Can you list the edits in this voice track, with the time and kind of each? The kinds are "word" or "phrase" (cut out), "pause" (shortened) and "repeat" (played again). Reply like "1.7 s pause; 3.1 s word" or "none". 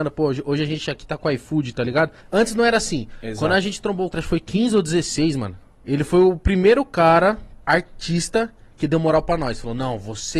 2.2 s pause; 4.1 s word; 5.7 s pause; 7.6 s pause